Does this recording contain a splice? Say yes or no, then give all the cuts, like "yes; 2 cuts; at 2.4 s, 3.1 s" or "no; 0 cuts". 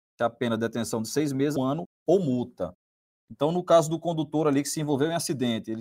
yes; 1 cut; at 1.6 s